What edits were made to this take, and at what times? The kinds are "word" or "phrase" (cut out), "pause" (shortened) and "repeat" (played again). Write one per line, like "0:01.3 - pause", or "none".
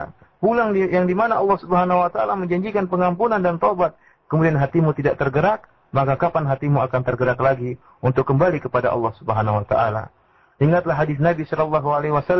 none